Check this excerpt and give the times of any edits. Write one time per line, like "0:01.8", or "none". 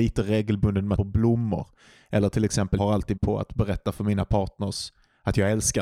0:01.0
0:02.8
0:03.2